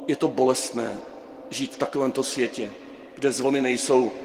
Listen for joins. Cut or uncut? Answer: uncut